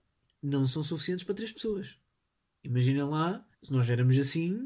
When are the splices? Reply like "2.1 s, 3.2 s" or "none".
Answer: 2.2 s, 3.5 s